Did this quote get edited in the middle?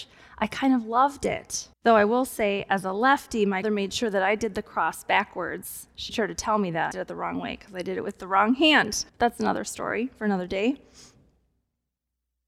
yes; 5 cuts; at 1.7 s, 3.6 s, 6.1 s, 6.9 s, 9.1 s

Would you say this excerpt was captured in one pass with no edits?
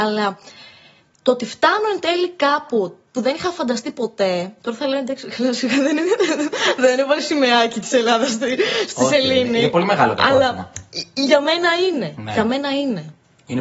no; 2 cuts; at 3.1 s, 4.6 s

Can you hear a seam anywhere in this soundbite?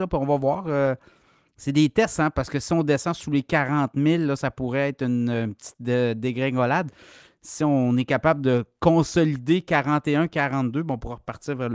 no; 0 cuts

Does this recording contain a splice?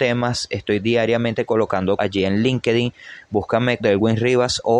yes; 2 cuts; at 2.0 s, 3.8 s

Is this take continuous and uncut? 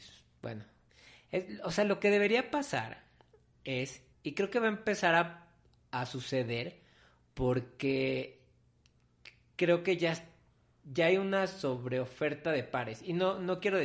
no; 1 cut; at 4.1 s

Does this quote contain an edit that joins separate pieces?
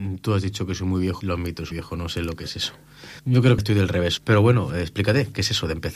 yes; 5 cuts; at 1.2 s, 1.7 s, 3.2 s, 3.6 s, 4.2 s

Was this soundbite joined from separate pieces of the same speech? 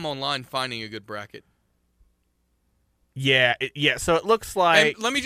no; 0 cuts

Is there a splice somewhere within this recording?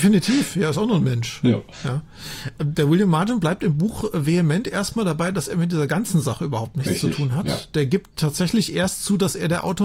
no; 0 cuts

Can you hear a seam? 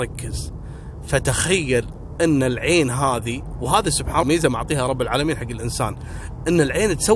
yes; 1 cut; at 4.2 s

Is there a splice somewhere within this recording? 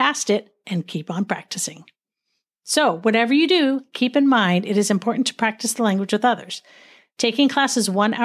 no; 0 cuts

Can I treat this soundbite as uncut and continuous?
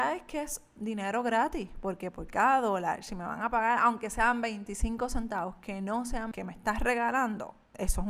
no; 1 cut; at 6.3 s

